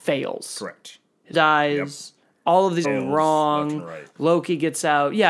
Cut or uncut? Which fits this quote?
cut